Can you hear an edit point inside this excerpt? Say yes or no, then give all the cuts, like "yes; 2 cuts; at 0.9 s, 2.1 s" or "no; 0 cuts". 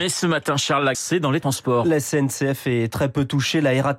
yes; 1 cut; at 0.9 s